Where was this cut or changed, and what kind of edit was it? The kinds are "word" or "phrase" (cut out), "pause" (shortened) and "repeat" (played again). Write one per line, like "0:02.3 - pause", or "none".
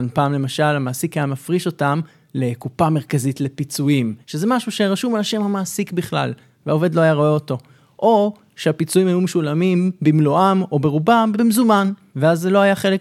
0:04.2 - pause
0:11.3 - word